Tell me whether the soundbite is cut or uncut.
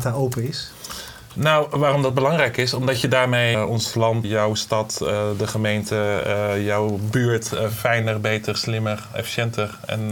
cut